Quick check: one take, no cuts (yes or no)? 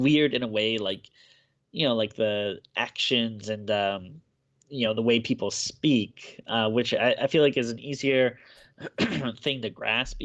yes